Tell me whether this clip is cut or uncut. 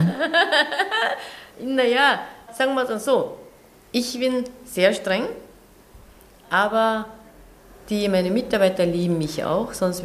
uncut